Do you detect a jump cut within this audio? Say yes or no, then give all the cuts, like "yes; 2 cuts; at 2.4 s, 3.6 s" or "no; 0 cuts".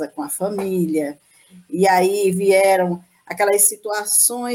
no; 0 cuts